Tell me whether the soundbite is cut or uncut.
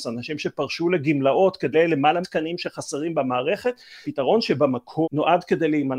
cut